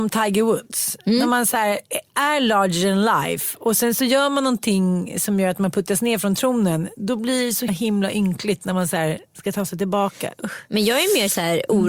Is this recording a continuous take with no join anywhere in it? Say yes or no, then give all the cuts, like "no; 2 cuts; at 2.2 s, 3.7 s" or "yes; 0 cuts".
no; 2 cuts; at 7.7 s, 9.3 s